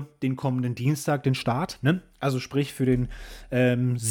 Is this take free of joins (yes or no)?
yes